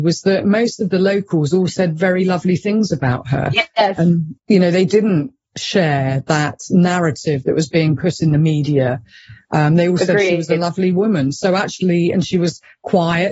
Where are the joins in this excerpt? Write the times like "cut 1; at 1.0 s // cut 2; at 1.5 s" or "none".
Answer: cut 1; at 4.4 s